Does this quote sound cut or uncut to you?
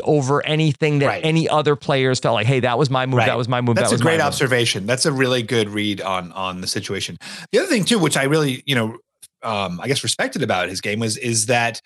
cut